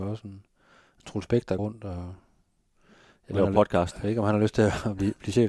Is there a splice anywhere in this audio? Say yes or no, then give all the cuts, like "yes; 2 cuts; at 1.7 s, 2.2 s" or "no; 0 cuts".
yes; 2 cuts; at 1.6 s, 3.3 s